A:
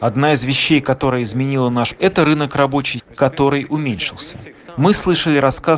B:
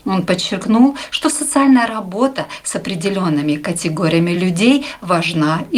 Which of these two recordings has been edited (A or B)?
A